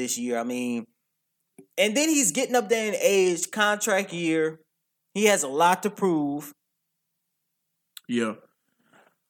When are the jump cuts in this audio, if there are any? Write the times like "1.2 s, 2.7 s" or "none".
none